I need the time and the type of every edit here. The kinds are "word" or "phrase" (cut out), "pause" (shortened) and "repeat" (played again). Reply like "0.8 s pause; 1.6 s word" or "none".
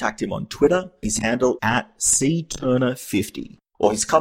1.0 s word; 1.6 s word

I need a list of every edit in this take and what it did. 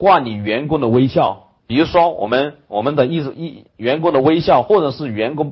1.6 s pause; 3.7 s pause

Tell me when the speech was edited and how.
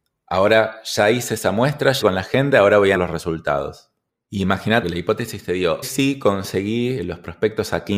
2.0 s word; 2.9 s word; 4.8 s word; 5.8 s word

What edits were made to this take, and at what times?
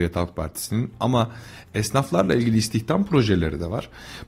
none

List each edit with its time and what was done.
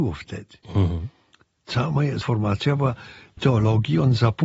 2.2 s word; 3.4 s word

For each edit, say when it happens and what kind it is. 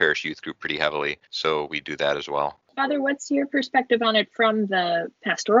1.2 s pause; 2.6 s pause

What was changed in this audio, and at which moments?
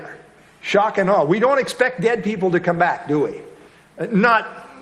none

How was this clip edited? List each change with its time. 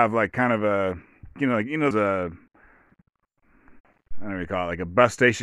1.4 s word; 1.9 s word

